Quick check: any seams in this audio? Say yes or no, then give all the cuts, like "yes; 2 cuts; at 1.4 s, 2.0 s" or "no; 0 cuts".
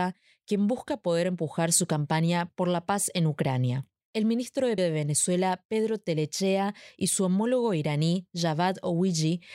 yes; 1 cut; at 4.8 s